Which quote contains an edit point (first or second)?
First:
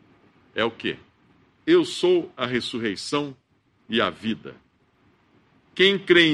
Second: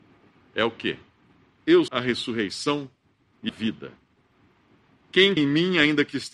second